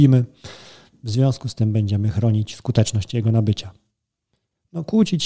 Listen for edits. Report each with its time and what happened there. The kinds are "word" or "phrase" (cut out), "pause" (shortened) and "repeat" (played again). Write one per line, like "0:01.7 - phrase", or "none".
none